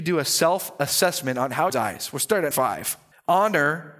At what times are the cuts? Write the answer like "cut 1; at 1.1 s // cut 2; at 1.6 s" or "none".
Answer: cut 1; at 1.7 s // cut 2; at 2.5 s // cut 3; at 3.1 s